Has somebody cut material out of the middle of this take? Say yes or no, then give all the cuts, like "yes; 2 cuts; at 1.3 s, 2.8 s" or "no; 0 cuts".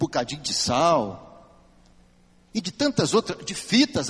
no; 0 cuts